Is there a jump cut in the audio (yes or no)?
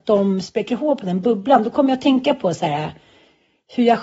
no